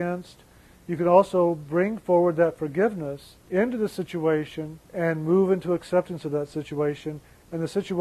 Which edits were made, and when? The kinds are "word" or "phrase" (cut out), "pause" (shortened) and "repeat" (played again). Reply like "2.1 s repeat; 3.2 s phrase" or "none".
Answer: 3.4 s pause; 4.9 s pause

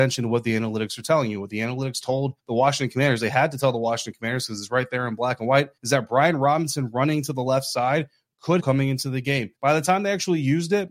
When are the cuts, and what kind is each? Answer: 2.4 s pause; 5.8 s pause; 8.6 s phrase; 9.6 s pause

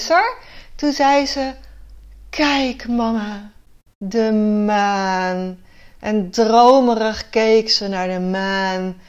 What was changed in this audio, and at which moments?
none

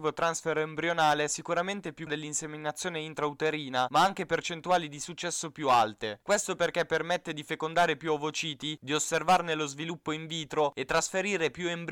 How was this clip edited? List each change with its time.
2.1 s word

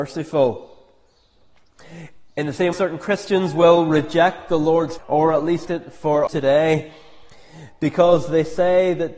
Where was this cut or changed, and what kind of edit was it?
2.7 s word; 5.0 s word; 5.7 s word; 6.3 s phrase

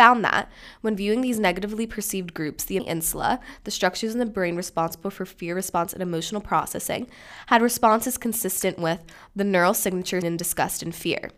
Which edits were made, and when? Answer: 2.8 s phrase; 10.2 s word

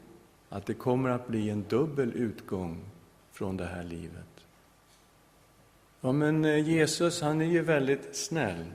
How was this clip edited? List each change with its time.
none

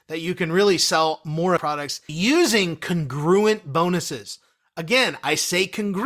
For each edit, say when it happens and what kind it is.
1.6 s word; 2.1 s word

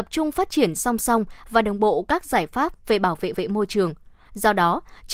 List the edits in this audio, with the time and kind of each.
3.3 s repeat

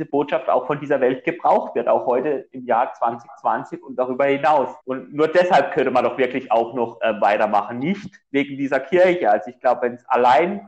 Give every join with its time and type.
4.8 s pause

